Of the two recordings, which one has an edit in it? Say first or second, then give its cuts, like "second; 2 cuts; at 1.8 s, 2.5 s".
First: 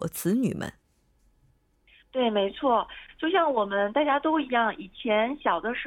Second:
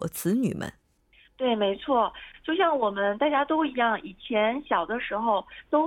second; 1 cut; at 1.0 s